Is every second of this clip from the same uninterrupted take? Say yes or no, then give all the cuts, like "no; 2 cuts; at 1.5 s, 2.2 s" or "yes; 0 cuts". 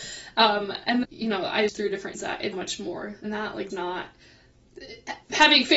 no; 6 cuts; at 1.0 s, 1.7 s, 2.1 s, 2.5 s, 3.2 s, 3.7 s